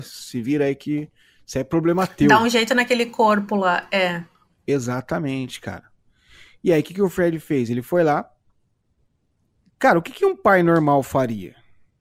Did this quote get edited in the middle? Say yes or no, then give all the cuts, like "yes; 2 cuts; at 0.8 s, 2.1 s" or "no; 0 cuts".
no; 0 cuts